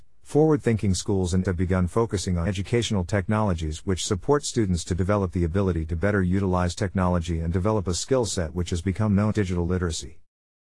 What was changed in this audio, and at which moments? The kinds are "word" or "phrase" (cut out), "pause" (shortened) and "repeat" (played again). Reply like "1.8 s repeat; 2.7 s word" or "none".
1.4 s word; 2.5 s word; 9.3 s word